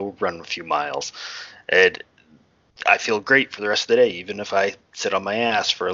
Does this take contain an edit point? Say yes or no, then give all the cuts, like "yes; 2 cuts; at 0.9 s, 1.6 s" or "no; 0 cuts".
no; 0 cuts